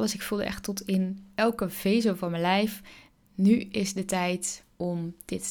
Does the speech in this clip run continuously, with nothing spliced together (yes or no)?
yes